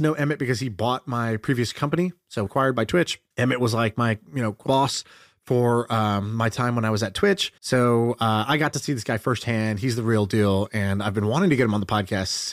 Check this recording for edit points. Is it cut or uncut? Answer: cut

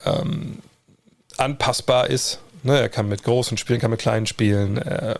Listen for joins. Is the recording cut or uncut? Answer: uncut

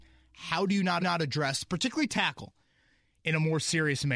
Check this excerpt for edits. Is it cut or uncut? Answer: cut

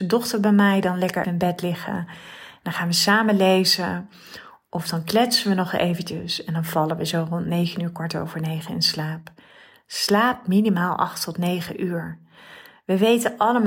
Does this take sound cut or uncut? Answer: cut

